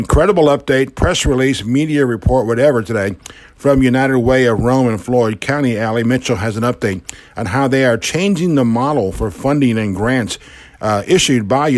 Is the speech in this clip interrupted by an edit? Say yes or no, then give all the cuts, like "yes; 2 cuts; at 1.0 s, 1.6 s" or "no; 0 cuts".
no; 0 cuts